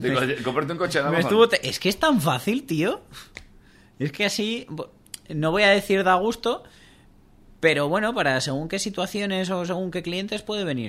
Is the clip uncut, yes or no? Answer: yes